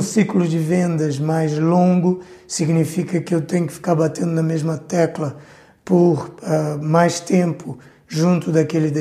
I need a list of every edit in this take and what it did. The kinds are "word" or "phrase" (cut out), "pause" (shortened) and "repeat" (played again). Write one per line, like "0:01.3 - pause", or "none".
none